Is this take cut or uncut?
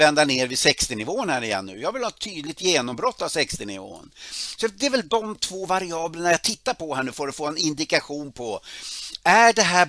uncut